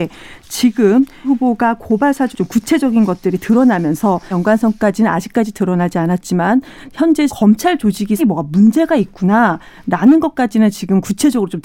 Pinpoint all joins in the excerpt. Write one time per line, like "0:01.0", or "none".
0:01.2
0:02.3
0:04.3
0:07.3
0:08.2